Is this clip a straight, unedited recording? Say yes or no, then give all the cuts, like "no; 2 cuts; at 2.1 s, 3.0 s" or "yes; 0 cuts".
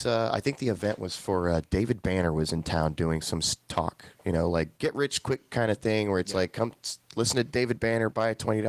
yes; 0 cuts